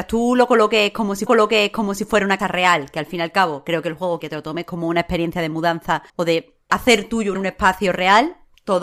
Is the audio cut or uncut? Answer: cut